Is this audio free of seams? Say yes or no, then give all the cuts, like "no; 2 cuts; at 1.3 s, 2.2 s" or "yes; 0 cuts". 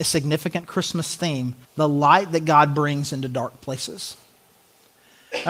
no; 1 cut; at 1.6 s